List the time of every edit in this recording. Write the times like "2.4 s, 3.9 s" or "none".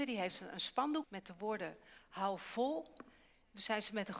1.0 s